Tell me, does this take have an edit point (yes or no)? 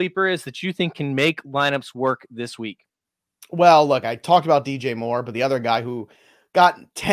no